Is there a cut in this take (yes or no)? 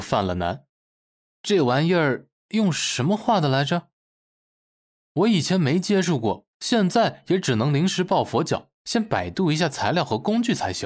yes